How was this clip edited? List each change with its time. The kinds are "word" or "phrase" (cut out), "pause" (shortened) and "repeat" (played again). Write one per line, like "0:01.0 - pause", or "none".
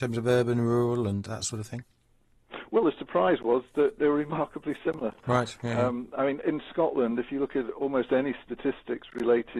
0:01.3 - word
0:04.0 - word